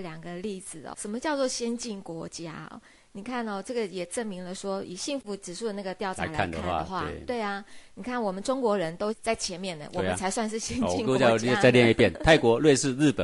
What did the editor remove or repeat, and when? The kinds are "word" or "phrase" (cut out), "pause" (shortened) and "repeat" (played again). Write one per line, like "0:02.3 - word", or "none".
0:00.9 - word